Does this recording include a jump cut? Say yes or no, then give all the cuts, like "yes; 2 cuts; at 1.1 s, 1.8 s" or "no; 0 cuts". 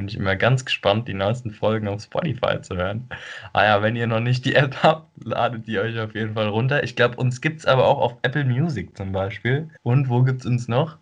yes; 1 cut; at 9.8 s